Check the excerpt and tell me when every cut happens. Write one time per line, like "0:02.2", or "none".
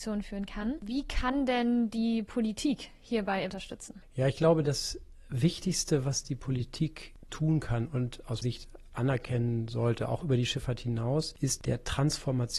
0:08.4
0:11.6